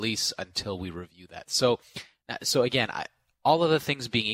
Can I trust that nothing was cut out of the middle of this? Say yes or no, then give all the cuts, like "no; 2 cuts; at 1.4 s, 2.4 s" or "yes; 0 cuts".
yes; 0 cuts